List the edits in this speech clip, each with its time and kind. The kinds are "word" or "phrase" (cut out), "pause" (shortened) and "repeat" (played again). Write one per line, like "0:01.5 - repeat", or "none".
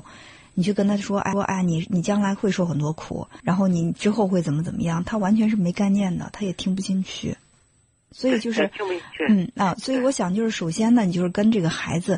0:01.3 - repeat
0:03.4 - pause